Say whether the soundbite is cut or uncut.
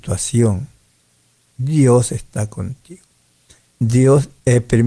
uncut